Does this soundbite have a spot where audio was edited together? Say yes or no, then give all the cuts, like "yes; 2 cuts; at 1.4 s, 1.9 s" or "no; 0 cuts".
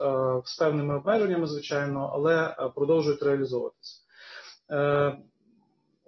no; 0 cuts